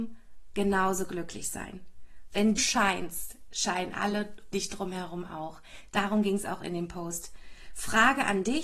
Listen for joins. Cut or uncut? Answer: cut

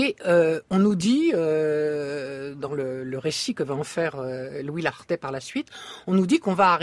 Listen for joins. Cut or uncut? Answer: uncut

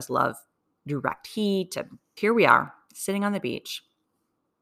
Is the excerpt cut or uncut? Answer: cut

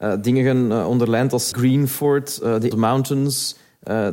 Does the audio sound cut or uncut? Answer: cut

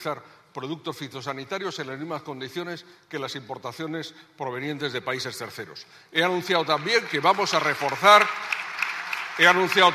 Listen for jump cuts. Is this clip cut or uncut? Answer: uncut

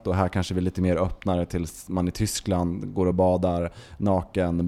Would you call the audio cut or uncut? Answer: uncut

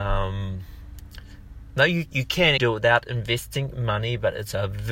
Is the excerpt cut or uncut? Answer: cut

